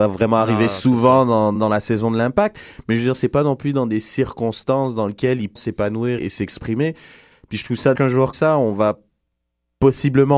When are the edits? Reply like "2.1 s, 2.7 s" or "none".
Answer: 1.6 s, 5.6 s, 6.2 s, 8.0 s, 8.3 s